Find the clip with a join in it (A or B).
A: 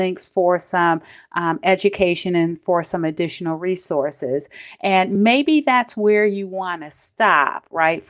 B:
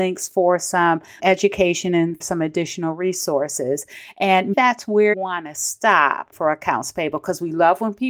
B